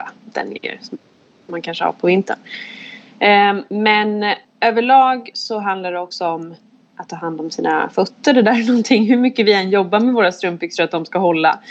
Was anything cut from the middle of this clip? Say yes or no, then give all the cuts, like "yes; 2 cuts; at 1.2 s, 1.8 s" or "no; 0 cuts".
no; 0 cuts